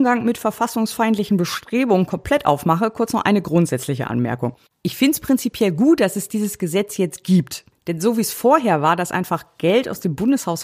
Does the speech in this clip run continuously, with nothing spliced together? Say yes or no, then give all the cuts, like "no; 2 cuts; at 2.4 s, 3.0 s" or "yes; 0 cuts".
yes; 0 cuts